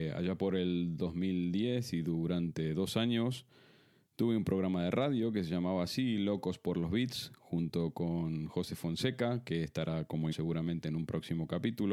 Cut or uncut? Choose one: cut